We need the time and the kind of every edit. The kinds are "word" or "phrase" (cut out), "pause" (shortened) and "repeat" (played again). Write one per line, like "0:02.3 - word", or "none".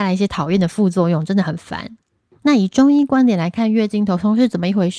0:02.1 - pause